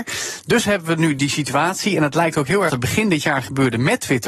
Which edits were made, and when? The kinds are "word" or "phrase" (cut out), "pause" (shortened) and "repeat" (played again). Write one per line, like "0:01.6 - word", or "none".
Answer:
0:02.7 - phrase